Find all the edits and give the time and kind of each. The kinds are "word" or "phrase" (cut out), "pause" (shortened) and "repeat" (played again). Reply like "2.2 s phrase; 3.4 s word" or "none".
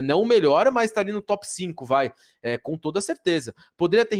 none